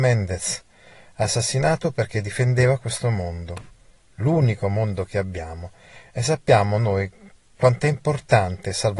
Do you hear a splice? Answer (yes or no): no